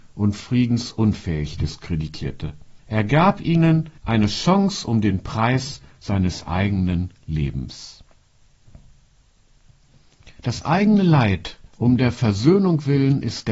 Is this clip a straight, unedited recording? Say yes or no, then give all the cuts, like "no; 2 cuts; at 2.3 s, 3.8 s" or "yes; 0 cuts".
no; 4 cuts; at 2.8 s, 4.0 s, 10.4 s, 11.7 s